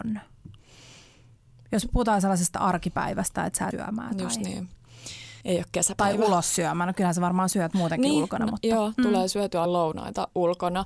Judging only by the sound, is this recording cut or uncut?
cut